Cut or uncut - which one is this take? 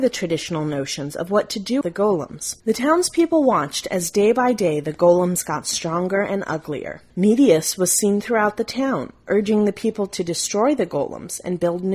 cut